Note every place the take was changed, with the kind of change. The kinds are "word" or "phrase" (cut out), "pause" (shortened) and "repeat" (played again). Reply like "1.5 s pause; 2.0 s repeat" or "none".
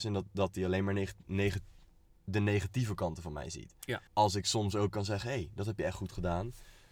4.1 s pause

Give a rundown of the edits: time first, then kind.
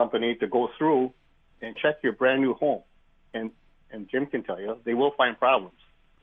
none

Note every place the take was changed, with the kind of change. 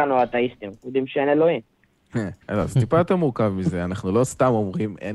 2.4 s pause

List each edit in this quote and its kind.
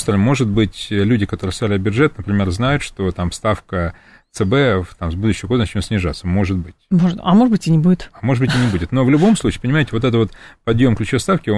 none

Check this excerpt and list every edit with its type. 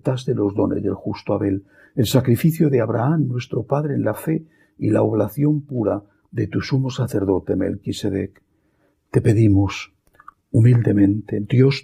none

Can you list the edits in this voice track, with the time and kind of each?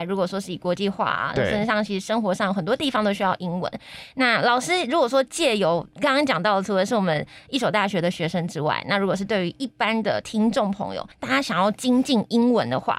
11.1 s pause

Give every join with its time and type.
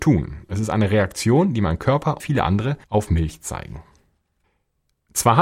2.2 s word; 2.8 s pause

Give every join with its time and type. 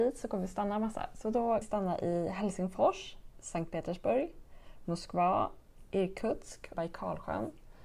1.6 s word; 6.7 s phrase

